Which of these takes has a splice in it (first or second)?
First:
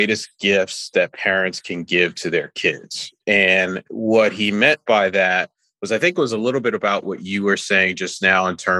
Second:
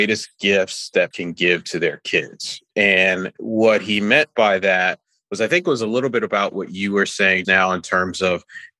second